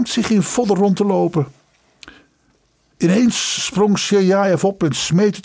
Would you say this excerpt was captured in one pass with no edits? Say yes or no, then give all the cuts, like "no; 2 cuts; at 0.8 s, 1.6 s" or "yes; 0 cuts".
yes; 0 cuts